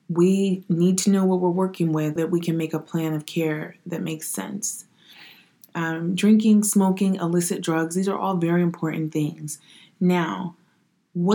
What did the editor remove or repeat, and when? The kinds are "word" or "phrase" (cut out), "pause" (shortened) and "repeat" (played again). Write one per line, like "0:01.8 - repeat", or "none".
0:02.2 - word